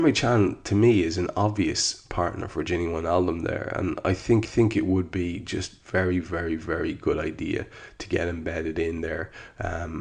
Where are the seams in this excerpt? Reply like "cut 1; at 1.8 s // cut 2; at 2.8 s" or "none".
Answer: cut 1; at 4.4 s